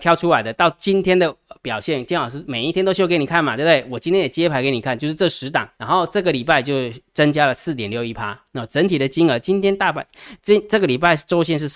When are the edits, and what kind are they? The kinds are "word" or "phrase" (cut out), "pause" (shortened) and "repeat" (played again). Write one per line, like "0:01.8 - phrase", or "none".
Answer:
0:05.7 - pause